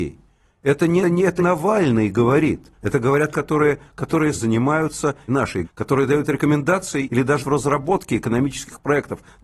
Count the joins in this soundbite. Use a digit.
9